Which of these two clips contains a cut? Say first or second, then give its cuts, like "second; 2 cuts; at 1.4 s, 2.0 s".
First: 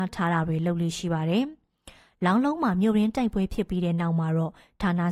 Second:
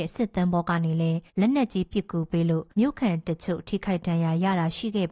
second; 2 cuts; at 1.3 s, 2.7 s